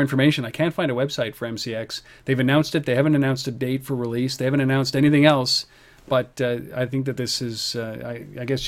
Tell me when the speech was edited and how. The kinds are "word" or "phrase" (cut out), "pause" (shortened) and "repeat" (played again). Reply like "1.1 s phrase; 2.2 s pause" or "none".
none